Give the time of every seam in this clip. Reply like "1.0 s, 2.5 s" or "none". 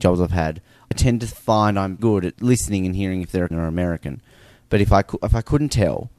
0.9 s, 2.0 s, 2.3 s, 3.5 s